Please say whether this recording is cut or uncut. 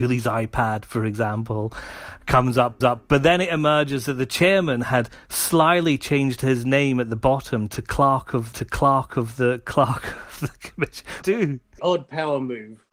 cut